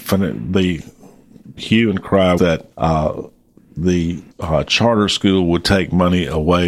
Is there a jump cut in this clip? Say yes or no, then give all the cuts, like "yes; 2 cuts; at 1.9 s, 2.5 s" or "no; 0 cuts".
yes; 4 cuts; at 1.6 s, 2.4 s, 2.7 s, 4.3 s